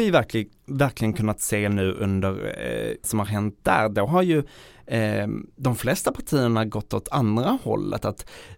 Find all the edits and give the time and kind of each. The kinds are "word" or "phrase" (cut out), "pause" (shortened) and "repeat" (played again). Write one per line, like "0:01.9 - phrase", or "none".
0:03.0 - phrase